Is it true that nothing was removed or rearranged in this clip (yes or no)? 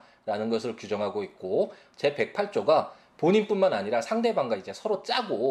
yes